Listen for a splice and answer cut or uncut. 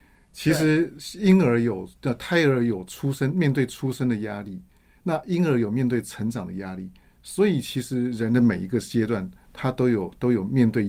uncut